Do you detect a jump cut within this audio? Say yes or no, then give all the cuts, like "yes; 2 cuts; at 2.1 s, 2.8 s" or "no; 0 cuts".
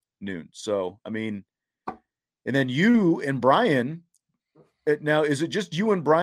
no; 0 cuts